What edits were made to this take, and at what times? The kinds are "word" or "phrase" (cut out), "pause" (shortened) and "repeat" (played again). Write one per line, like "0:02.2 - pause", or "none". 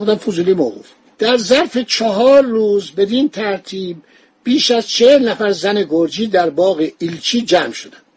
none